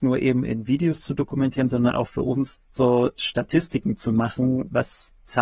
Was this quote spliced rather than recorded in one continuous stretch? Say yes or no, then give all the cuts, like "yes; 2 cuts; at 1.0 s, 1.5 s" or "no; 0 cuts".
yes; 1 cut; at 2.6 s